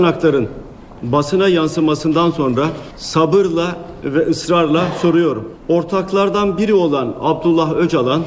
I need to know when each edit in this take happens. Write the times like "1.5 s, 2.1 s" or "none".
none